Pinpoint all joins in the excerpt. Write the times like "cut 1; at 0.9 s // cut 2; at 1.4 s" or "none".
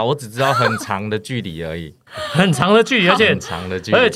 cut 1; at 2.1 s

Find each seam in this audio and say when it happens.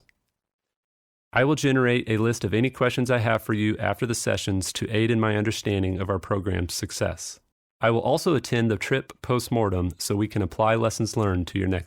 cut 1; at 7.5 s

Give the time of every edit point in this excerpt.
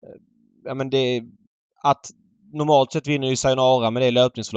none

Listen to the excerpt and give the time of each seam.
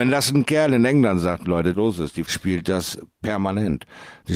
cut 1; at 1.7 s // cut 2; at 2.2 s

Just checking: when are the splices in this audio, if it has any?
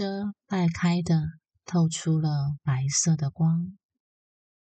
none

